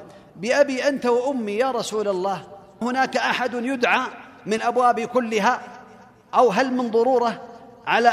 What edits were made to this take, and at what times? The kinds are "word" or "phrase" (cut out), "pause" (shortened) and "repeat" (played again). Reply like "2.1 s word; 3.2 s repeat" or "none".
2.8 s word; 4.6 s word